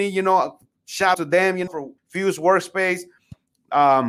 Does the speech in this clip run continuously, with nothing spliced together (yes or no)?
no